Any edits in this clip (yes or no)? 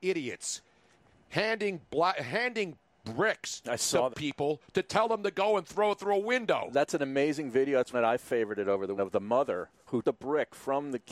yes